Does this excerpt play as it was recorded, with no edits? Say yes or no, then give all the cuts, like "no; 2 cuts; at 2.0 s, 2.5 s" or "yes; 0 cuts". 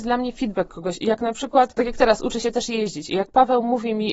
yes; 0 cuts